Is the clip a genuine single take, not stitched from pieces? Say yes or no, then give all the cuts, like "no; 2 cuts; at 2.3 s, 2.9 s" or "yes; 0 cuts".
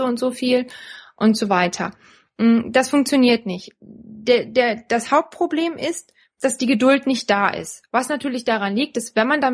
yes; 0 cuts